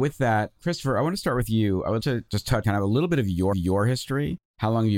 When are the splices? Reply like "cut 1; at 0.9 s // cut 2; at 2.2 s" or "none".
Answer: cut 1; at 2.0 s // cut 2; at 2.6 s // cut 3; at 3.5 s